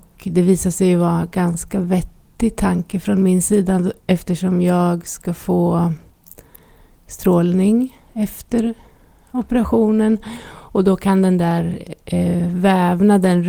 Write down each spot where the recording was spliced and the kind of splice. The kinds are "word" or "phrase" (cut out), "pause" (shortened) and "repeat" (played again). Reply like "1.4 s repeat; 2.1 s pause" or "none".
8.0 s pause